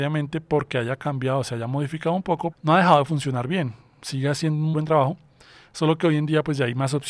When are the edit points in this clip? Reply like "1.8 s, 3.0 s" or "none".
2.5 s, 4.7 s